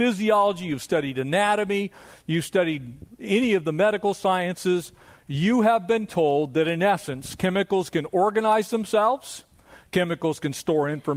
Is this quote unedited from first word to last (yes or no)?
yes